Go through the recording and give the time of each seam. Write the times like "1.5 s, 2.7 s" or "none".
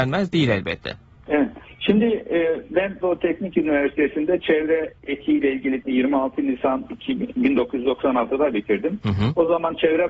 1.2 s, 3.0 s, 5.0 s, 5.8 s